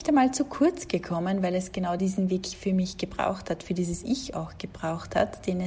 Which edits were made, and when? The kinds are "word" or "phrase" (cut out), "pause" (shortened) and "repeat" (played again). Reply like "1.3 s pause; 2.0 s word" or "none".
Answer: none